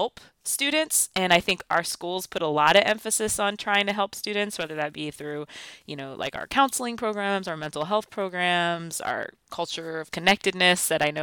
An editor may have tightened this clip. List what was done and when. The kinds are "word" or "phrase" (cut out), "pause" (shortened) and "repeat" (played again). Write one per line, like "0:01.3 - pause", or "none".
none